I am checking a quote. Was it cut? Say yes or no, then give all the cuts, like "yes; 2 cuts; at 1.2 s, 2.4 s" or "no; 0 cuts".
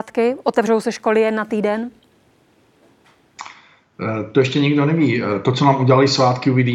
no; 0 cuts